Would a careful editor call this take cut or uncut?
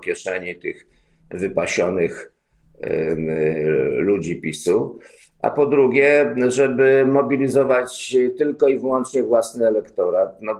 uncut